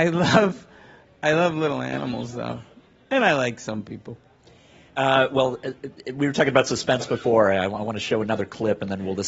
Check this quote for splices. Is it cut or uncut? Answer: uncut